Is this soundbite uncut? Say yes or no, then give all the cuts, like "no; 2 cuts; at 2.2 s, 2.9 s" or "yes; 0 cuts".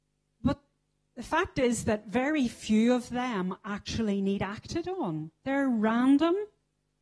yes; 0 cuts